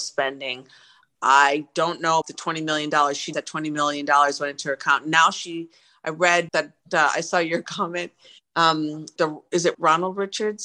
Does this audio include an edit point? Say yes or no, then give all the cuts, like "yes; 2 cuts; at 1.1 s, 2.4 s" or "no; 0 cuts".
yes; 5 cuts; at 2.2 s, 3.3 s, 6.5 s, 9.2 s, 9.7 s